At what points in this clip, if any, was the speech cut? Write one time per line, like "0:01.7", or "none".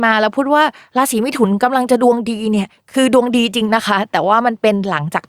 none